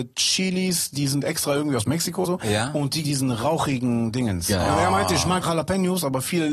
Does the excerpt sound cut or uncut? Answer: cut